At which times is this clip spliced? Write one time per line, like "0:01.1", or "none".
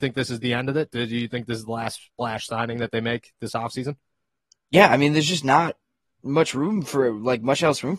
none